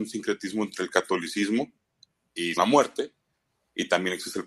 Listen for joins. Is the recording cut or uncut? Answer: cut